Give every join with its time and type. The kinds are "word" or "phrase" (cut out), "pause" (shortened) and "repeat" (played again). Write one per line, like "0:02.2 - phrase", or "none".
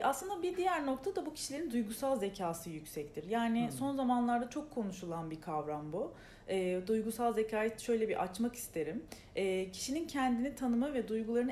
none